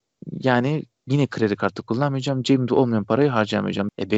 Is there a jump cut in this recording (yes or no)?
no